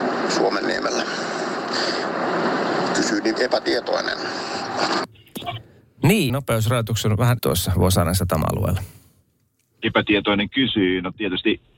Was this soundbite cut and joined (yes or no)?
yes